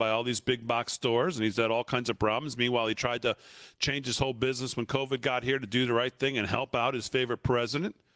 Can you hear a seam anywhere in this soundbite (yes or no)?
no